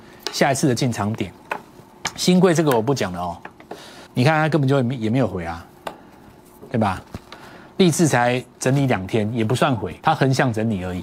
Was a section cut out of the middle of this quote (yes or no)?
yes